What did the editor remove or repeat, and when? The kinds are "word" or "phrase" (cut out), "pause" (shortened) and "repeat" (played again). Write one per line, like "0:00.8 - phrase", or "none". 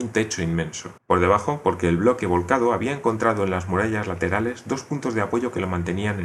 0:01.0 - pause